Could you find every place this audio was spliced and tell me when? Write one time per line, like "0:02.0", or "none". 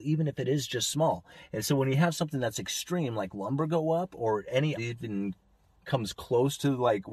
0:04.8